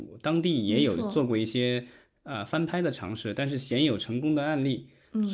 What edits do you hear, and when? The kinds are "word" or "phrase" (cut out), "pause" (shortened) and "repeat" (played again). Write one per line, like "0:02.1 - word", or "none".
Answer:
none

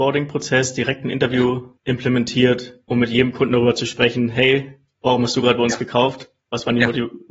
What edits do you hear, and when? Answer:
0:01.8 - pause

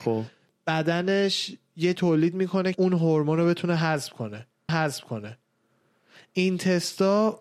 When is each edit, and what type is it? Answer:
0:02.0 - word
0:02.7 - word
0:04.7 - repeat

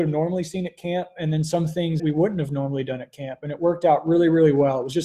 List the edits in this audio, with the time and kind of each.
0:02.0 - word

